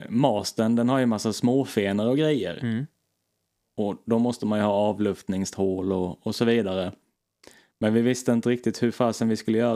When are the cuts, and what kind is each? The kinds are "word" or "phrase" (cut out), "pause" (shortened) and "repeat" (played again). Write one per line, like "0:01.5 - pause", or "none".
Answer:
none